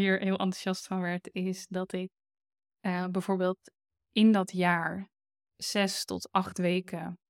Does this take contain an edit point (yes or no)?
no